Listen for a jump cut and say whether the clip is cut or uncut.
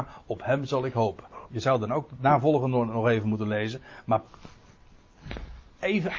uncut